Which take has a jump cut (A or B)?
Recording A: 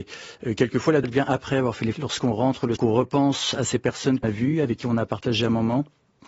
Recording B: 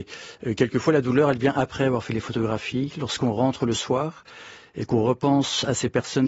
A